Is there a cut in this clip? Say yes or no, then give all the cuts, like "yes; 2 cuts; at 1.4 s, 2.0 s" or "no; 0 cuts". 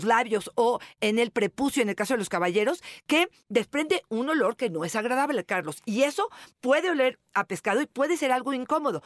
no; 0 cuts